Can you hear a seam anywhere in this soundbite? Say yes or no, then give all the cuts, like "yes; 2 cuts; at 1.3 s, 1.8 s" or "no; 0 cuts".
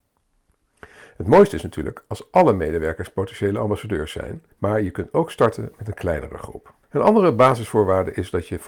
yes; 2 cuts; at 4.5 s, 6.8 s